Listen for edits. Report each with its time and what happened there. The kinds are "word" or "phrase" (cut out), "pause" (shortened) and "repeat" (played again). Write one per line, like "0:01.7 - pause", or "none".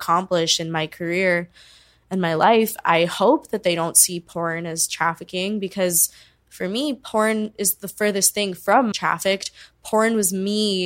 0:08.9 - phrase